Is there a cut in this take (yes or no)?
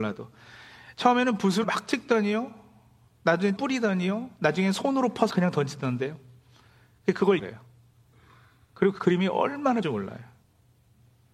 yes